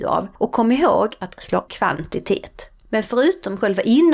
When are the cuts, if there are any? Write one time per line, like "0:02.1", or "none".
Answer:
0:01.4
0:01.7